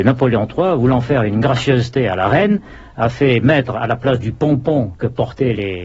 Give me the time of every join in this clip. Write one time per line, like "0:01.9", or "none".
none